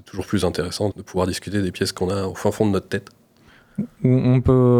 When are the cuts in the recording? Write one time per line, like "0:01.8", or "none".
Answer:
0:00.9